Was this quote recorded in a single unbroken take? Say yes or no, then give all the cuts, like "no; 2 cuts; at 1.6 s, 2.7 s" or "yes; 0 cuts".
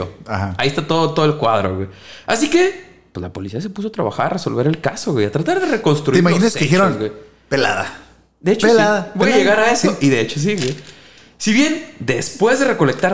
yes; 0 cuts